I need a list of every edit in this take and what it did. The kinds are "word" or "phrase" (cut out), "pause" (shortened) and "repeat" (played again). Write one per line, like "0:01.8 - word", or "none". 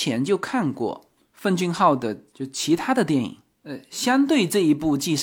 none